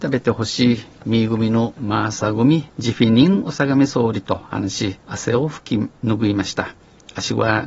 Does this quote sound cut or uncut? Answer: cut